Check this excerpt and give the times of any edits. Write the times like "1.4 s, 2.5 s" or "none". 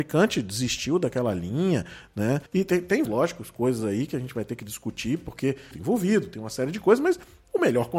2.5 s, 3.0 s, 5.7 s